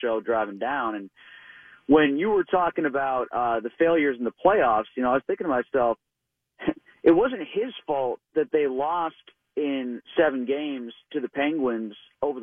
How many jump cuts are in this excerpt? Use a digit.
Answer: 0